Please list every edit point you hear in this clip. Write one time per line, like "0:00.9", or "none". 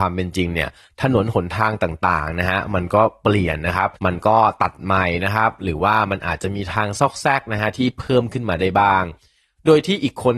0:04.0